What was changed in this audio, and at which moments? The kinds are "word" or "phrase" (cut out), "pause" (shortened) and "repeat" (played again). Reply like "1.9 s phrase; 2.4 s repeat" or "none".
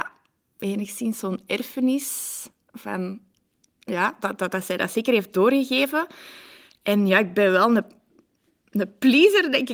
none